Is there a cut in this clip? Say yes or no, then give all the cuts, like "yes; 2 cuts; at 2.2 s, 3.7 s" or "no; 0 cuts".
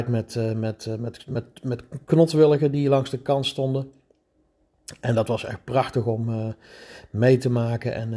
no; 0 cuts